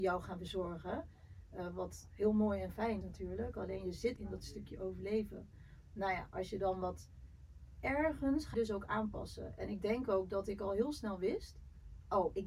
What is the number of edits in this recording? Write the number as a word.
four